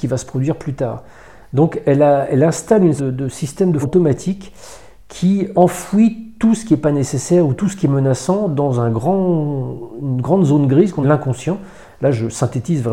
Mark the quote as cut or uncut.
cut